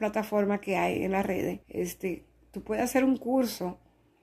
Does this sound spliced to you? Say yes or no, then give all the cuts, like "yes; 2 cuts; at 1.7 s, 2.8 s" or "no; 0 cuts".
yes; 1 cut; at 1.6 s